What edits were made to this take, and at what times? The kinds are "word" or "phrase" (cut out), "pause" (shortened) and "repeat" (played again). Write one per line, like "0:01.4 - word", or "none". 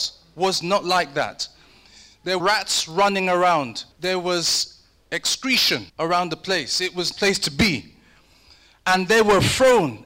0:02.4 - word
0:03.9 - pause
0:05.9 - pause
0:07.1 - phrase